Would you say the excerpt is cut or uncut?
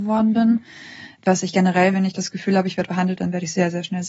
cut